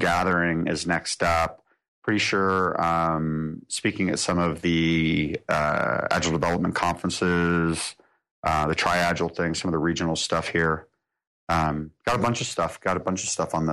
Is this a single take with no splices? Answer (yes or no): yes